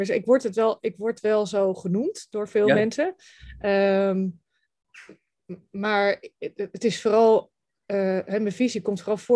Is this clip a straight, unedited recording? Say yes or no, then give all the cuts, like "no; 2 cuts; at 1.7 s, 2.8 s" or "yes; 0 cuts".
yes; 0 cuts